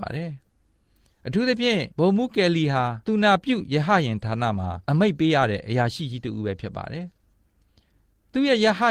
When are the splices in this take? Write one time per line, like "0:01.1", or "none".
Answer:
0:01.9
0:03.0
0:04.8